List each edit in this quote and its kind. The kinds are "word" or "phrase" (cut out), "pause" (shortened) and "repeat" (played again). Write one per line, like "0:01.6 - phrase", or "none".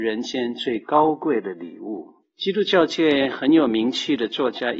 0:02.2 - pause